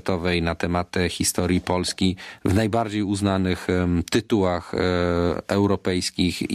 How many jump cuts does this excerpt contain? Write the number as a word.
zero